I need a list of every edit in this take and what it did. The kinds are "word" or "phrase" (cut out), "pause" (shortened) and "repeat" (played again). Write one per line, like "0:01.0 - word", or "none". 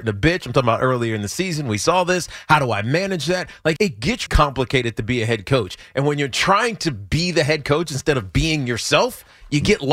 0:03.8 - word
0:04.3 - word